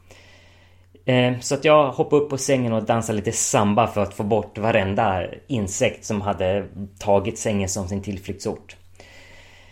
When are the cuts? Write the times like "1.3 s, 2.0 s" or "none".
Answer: none